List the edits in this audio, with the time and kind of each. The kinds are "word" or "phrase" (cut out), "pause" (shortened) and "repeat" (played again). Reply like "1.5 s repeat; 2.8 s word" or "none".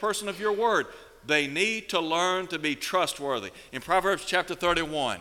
none